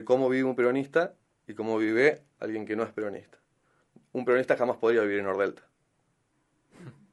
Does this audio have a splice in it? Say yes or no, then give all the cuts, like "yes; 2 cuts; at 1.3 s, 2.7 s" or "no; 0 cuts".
no; 0 cuts